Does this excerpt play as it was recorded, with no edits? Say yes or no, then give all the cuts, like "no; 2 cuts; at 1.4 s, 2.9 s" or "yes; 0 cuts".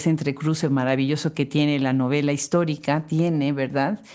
yes; 0 cuts